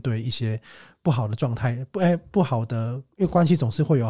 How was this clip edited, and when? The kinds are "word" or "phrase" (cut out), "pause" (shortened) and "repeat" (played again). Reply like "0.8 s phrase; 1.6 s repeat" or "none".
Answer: none